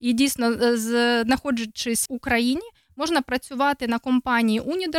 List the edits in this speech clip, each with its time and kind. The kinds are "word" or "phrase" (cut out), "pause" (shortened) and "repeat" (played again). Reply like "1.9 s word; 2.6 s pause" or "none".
2.1 s word